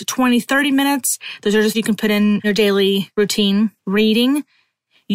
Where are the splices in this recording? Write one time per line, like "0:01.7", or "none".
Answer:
0:01.7
0:02.4
0:03.8